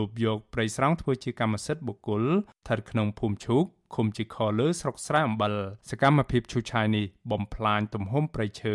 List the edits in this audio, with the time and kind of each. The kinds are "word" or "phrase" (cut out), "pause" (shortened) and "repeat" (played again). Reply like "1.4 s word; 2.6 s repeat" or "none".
5.8 s pause